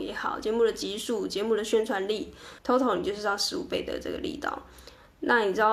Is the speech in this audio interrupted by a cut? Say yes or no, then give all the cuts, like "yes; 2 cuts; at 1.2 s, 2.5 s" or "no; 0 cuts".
yes; 1 cut; at 2.6 s